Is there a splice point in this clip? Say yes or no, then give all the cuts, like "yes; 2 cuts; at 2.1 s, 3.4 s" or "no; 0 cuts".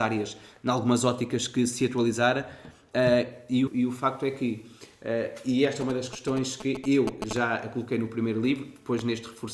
yes; 1 cut; at 3.7 s